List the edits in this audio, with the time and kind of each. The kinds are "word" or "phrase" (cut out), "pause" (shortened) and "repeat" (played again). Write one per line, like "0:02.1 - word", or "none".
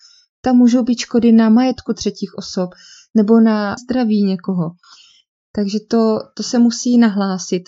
0:03.8 - phrase